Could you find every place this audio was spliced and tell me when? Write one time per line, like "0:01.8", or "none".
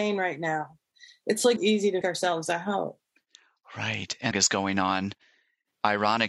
0:01.6
0:02.0
0:04.3

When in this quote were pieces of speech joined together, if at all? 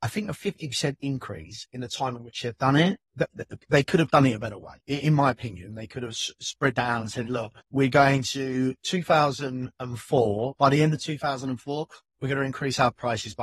0:03.1
0:04.8
0:07.6

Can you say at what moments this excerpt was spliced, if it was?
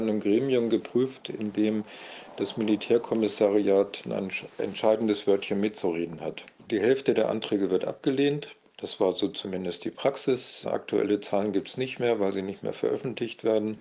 none

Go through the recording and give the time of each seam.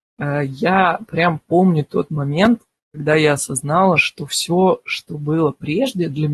0:02.8

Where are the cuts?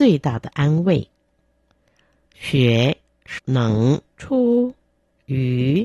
0:03.4
0:04.1

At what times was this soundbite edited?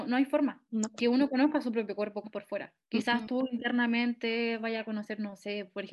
0:02.2
0:02.8

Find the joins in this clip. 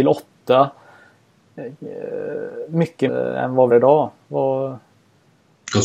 0:03.1
0:03.7

